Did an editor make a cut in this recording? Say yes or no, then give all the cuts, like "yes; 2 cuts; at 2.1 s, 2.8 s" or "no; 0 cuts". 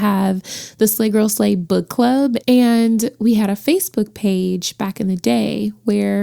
no; 0 cuts